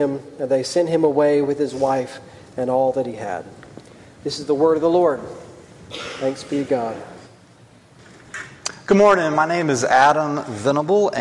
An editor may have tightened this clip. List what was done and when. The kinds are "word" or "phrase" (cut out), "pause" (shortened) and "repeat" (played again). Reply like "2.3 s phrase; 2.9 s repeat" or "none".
none